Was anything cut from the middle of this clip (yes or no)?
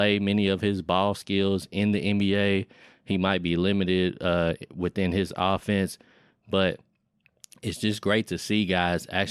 no